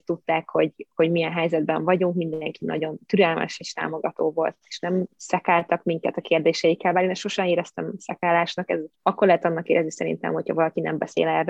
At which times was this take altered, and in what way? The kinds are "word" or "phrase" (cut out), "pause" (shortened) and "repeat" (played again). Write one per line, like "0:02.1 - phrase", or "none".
0:05.1 - pause
0:08.9 - pause